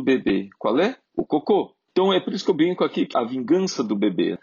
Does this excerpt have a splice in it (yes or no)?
yes